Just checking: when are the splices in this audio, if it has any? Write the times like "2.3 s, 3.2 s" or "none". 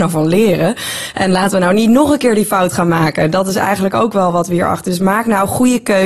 none